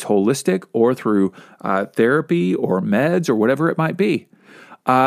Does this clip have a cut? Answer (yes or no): no